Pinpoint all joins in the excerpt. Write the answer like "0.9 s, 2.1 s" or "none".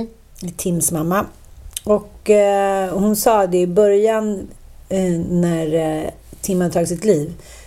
none